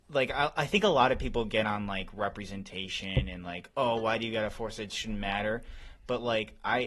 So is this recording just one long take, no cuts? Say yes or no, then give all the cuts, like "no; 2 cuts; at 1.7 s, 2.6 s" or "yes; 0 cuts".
yes; 0 cuts